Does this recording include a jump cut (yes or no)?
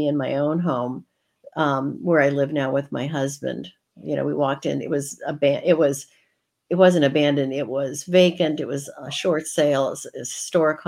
no